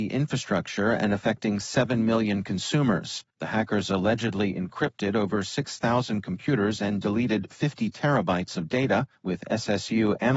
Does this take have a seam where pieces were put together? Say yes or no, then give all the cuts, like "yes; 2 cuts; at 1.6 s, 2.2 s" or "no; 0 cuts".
yes; 2 cuts; at 3.3 s, 9.2 s